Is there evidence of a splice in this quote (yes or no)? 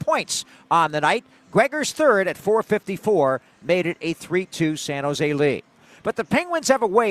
no